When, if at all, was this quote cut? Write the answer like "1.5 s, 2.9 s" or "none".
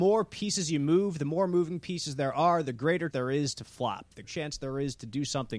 3.1 s, 4.2 s